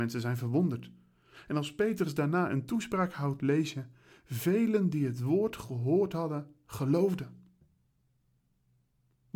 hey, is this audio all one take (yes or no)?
yes